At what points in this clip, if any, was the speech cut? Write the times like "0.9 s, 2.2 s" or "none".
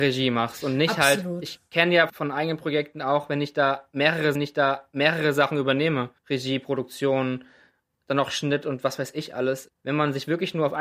2.1 s, 4.3 s, 6.2 s, 9.7 s